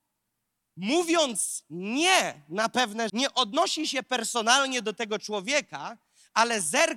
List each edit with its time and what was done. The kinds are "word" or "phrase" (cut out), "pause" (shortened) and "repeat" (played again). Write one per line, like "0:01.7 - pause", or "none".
0:03.1 - word